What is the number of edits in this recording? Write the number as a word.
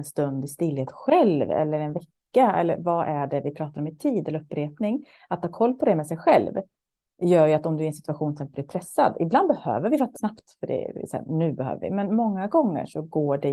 one